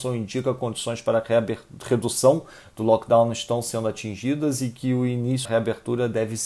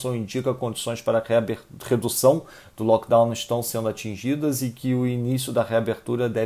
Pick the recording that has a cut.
first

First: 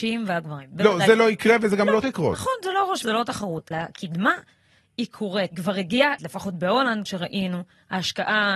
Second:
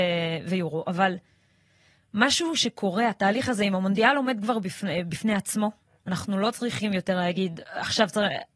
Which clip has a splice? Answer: first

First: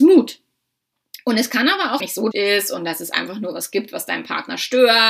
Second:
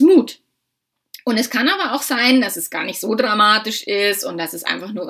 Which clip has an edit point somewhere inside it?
first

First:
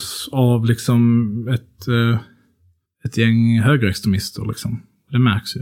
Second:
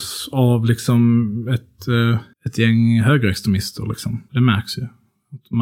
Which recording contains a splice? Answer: second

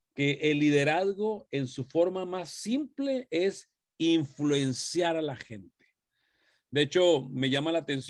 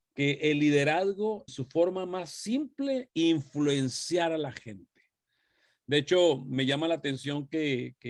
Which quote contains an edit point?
second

